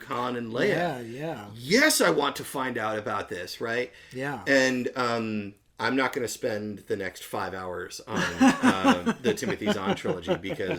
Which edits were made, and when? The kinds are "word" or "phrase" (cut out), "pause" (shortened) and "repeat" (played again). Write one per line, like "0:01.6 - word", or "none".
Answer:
none

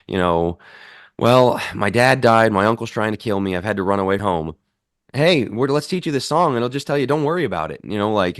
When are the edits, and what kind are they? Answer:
0:04.2 - phrase

